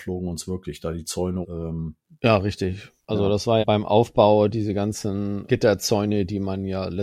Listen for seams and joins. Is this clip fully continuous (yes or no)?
no